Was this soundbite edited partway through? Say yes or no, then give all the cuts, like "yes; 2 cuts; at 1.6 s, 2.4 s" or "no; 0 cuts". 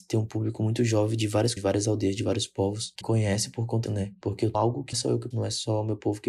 yes; 6 cuts; at 1.6 s, 3.0 s, 3.9 s, 4.5 s, 4.9 s, 5.3 s